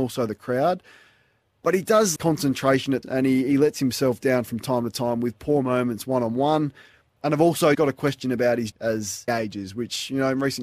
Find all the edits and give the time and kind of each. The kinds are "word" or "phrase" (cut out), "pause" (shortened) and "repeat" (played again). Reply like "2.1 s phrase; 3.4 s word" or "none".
2.2 s word; 3.0 s word; 7.7 s word; 8.7 s word; 9.3 s word